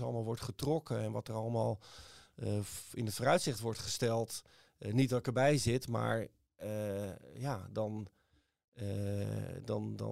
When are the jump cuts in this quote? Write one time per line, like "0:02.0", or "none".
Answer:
none